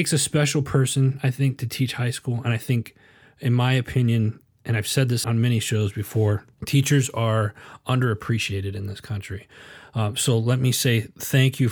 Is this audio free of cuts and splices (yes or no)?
no